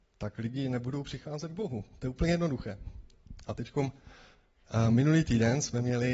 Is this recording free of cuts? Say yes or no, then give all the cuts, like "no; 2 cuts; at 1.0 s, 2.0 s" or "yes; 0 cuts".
yes; 0 cuts